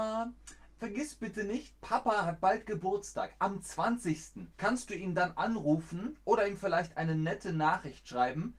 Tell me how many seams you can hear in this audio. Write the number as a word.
one